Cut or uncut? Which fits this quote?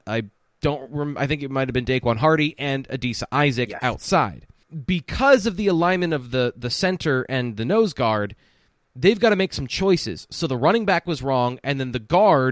uncut